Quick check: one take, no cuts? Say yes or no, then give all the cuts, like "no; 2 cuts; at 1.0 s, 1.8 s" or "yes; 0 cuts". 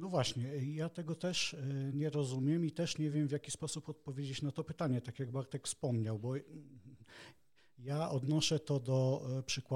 yes; 0 cuts